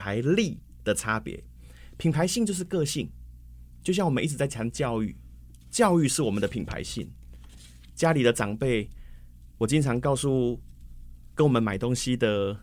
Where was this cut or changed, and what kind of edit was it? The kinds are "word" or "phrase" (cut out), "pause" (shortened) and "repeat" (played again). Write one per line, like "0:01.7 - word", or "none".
0:05.6 - pause